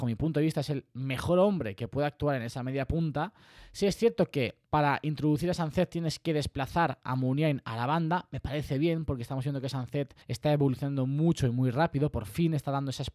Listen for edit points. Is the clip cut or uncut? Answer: cut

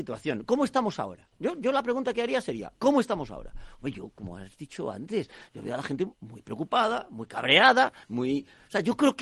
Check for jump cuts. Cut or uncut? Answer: cut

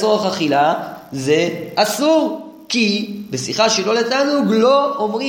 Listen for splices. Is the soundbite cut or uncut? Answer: uncut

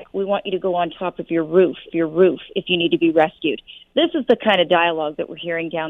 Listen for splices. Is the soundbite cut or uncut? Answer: cut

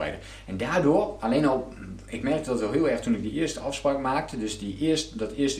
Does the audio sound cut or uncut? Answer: uncut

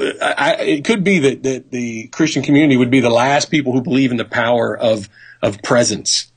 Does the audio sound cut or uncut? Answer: uncut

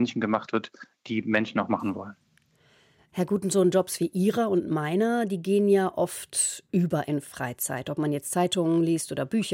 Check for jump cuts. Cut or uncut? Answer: uncut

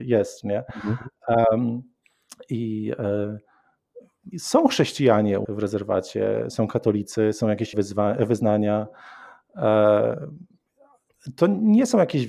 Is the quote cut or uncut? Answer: cut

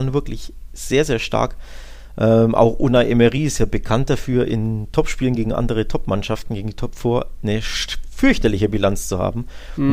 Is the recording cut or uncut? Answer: uncut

